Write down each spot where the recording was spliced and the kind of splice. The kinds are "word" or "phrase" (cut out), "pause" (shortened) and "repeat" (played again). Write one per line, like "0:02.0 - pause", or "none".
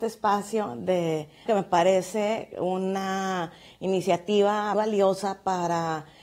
0:01.5 - word
0:04.7 - word